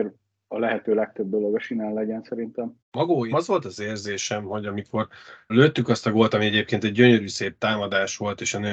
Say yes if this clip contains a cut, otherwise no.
yes